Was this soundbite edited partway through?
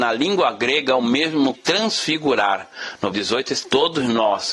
yes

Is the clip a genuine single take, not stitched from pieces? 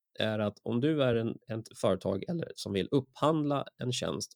yes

